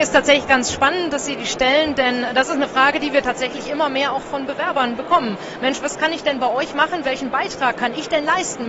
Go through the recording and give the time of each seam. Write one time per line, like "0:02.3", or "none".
none

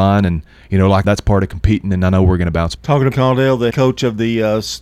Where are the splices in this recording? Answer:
0:01.0
0:02.8
0:03.1
0:03.7

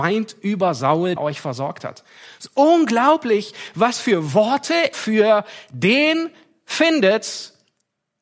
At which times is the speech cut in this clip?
0:01.2
0:04.9

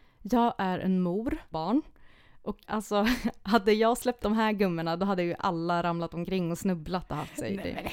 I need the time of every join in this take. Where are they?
0:01.5
0:02.6
0:04.2

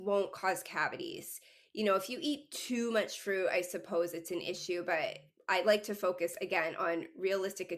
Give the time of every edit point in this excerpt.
none

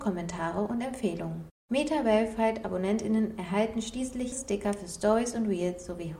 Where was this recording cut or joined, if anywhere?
0:04.3

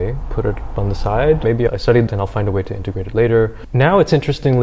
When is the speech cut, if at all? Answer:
0:02.1

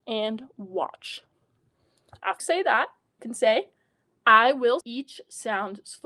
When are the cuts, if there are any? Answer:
0:02.4
0:03.2
0:04.8

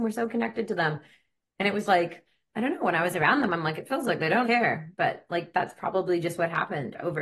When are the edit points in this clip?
0:01.9
0:04.4

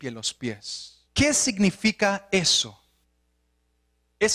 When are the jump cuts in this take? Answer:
0:01.1

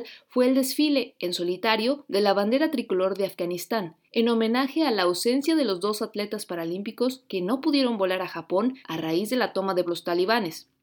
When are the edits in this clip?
0:04.0
0:08.8
0:09.9

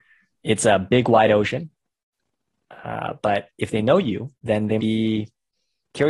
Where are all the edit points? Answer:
0:04.3
0:04.8

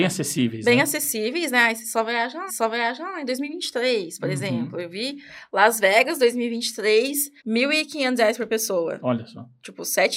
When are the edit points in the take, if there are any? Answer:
0:02.5
0:07.4

